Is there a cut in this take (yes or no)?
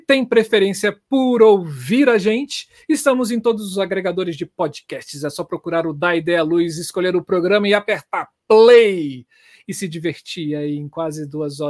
no